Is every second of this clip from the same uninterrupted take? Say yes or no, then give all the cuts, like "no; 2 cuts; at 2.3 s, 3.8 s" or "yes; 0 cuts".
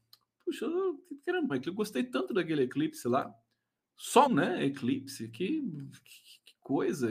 no; 2 cuts; at 1.5 s, 4.3 s